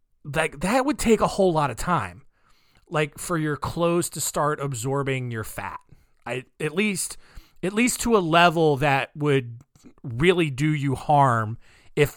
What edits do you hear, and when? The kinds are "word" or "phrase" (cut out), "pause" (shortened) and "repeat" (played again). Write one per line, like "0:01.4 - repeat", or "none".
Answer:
0:06.5 - pause